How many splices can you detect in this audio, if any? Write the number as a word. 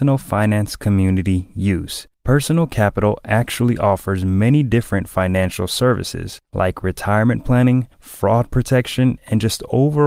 three